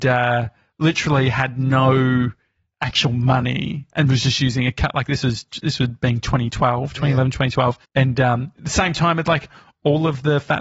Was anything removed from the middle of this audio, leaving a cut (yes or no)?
yes